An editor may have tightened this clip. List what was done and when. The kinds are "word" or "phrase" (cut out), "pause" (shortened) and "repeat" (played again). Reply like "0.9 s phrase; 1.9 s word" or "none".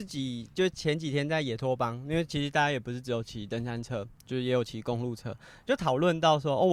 none